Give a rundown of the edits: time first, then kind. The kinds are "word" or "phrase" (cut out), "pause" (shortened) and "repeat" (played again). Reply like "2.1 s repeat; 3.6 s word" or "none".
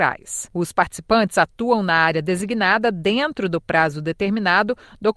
none